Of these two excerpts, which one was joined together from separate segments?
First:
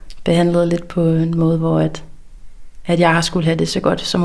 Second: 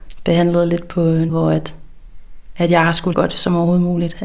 second; 2 cuts; at 1.3 s, 3.1 s

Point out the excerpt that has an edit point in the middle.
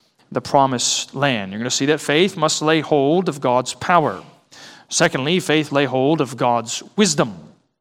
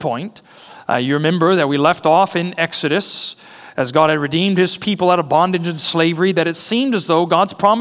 first; 1 cut; at 5.7 s

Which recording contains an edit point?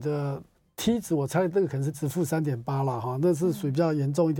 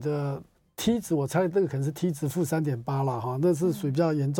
first; 1 cut; at 1.9 s

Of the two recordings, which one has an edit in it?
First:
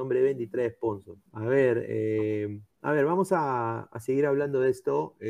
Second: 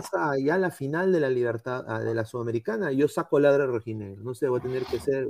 first; 2 cuts; at 1.3 s, 2.7 s

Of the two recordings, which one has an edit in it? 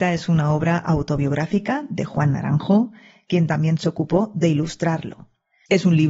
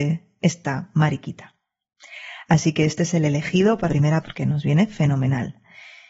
second; 2 cuts; at 3.9 s, 4.2 s

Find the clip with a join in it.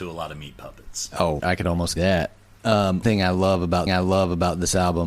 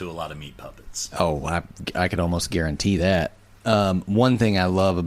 first; 4 cuts; at 1.4 s, 2.0 s, 3.0 s, 3.9 s

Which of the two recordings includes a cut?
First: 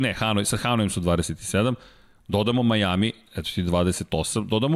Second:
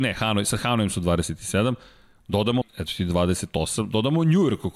second; 1 cut; at 2.6 s

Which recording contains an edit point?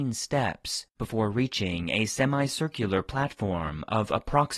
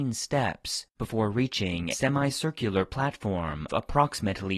second; 2 cuts; at 1.9 s, 3.7 s

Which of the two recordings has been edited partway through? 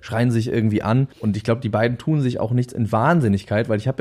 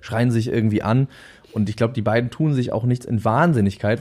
first; 1 cut; at 1.1 s

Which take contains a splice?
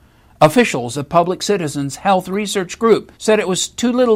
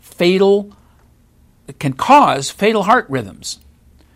first; 2 cuts; at 0.9 s, 3.1 s

